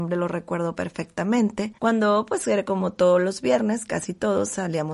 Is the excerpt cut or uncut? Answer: cut